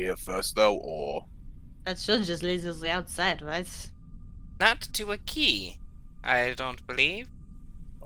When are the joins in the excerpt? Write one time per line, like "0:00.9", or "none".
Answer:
none

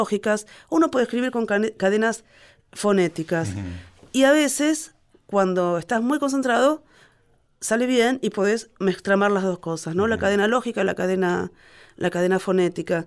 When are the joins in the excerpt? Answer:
none

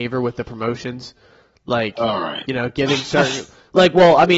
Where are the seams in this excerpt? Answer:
none

